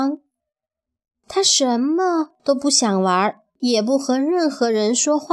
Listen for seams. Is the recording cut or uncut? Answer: cut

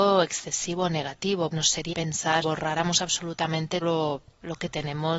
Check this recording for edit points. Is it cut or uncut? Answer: cut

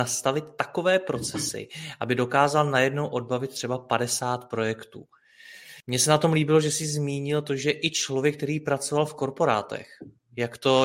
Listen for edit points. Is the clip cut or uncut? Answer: cut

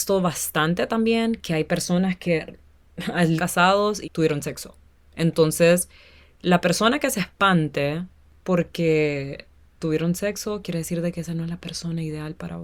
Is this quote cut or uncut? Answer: cut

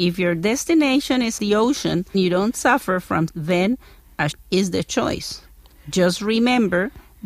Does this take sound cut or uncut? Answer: cut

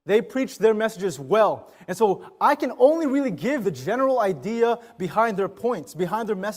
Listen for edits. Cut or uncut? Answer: cut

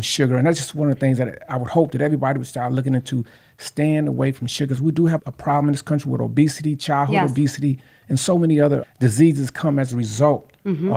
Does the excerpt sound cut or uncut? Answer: cut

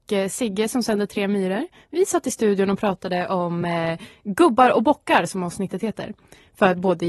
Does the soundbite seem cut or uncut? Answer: uncut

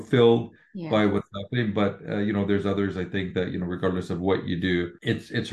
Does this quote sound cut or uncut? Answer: uncut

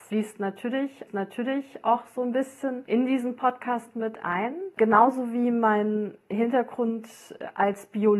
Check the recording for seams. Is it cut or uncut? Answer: cut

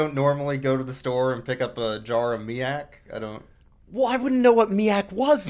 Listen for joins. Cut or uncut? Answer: uncut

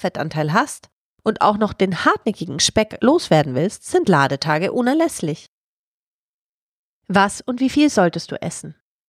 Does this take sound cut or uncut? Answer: uncut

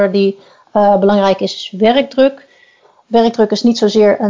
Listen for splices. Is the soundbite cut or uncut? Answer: uncut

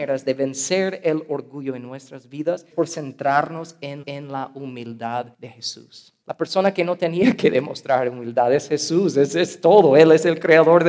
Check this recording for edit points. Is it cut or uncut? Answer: cut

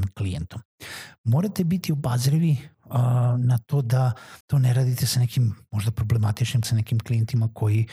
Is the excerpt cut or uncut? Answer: cut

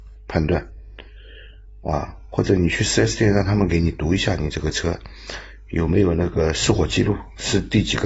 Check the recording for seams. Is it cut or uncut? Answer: uncut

